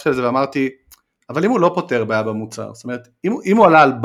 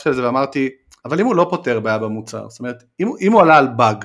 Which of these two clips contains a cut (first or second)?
second